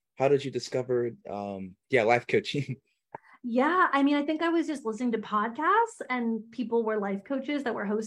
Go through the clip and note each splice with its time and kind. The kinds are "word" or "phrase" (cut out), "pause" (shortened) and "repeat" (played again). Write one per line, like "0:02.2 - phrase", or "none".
none